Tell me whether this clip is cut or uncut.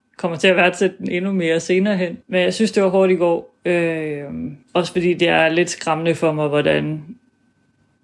cut